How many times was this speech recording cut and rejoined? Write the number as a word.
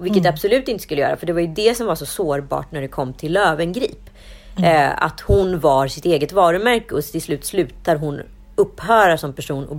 zero